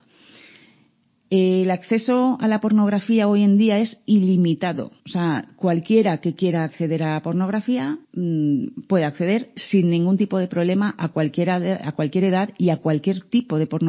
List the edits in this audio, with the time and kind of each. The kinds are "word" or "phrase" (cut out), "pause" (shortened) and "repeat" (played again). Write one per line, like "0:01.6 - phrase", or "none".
0:05.0 - pause
0:08.0 - pause